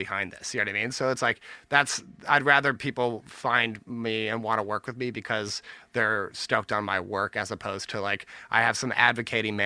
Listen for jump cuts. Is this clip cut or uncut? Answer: uncut